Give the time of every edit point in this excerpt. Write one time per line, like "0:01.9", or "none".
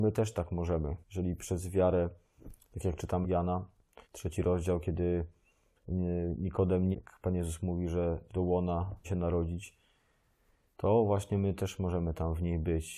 0:01.0
0:03.2
0:04.0
0:06.9
0:08.3
0:09.0